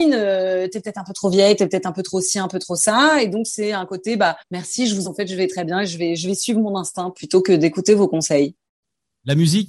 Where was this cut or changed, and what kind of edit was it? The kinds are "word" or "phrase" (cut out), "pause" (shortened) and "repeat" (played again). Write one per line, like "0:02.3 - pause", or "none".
0:04.4 - pause
0:05.0 - word